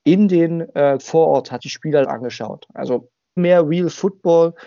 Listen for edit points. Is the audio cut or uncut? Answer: cut